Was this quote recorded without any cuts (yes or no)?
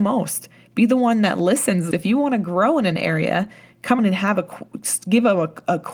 no